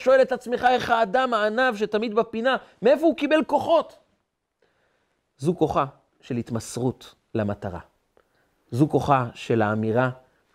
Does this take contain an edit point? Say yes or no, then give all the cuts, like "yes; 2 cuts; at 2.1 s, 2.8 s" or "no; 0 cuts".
no; 0 cuts